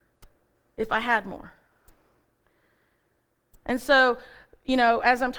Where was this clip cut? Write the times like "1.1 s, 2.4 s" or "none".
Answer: none